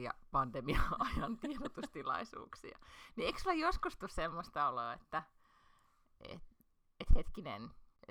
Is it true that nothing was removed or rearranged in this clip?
yes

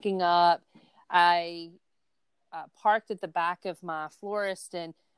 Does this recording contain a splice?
no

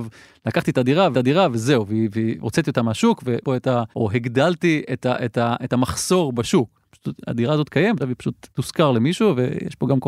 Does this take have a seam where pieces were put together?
yes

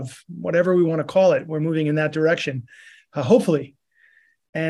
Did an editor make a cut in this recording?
no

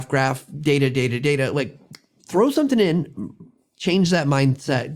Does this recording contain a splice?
no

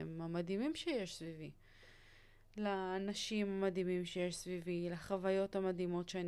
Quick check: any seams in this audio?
no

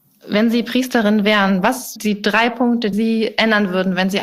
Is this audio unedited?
no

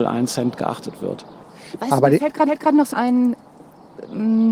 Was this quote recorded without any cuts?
no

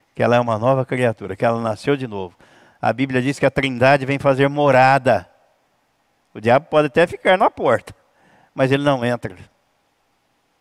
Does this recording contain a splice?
no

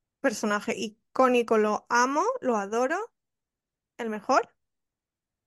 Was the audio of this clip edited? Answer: no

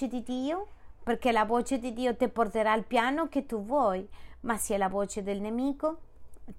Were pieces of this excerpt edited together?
no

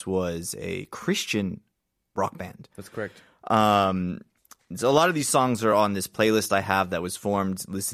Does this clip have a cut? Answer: no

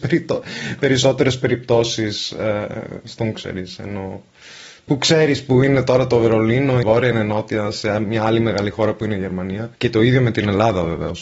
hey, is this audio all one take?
no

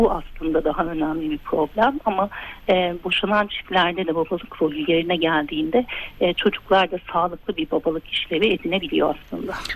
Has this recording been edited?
no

